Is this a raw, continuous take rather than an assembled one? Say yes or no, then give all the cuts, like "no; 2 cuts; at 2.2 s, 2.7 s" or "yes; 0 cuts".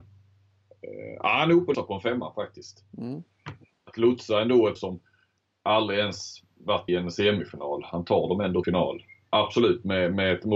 no; 4 cuts; at 1.7 s, 4.8 s, 6.9 s, 8.6 s